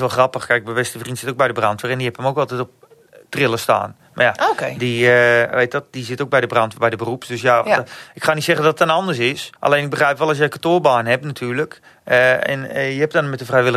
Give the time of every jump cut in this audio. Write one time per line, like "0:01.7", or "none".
0:09.6